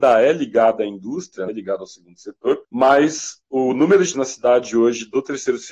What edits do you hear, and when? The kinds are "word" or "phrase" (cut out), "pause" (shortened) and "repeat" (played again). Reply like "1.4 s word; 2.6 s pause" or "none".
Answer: 1.5 s word; 2.6 s pause; 4.1 s word